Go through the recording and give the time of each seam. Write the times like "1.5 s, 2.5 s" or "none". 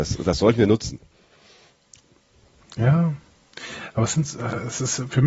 none

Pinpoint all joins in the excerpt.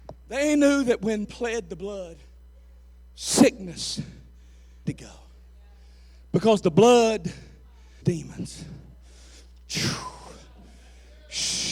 1.2 s, 4.9 s, 8.0 s

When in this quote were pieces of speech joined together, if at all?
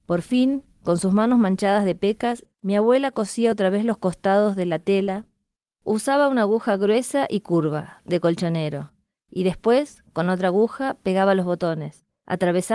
none

